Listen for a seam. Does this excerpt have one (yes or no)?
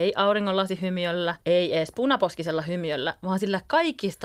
yes